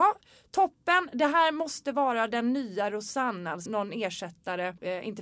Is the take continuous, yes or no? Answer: no